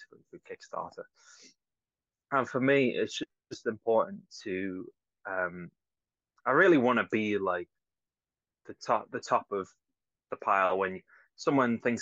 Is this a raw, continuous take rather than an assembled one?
yes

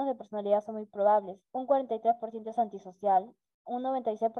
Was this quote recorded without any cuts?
no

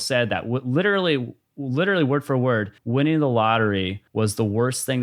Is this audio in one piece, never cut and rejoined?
no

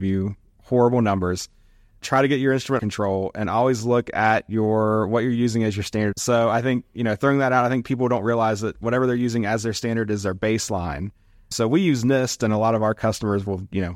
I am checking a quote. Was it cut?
yes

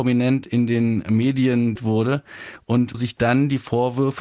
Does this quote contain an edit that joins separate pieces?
yes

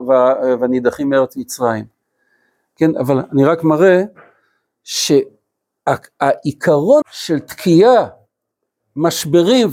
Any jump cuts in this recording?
yes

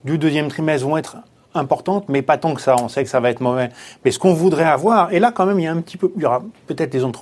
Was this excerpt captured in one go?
yes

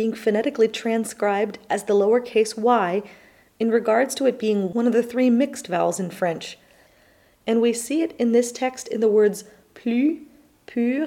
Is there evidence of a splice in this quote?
no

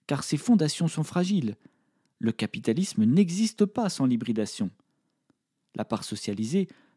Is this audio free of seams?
yes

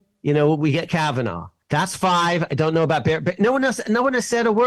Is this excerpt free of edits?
yes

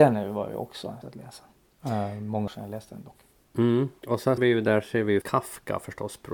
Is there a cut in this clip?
yes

